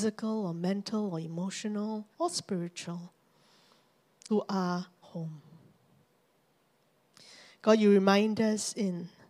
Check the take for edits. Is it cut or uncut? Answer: cut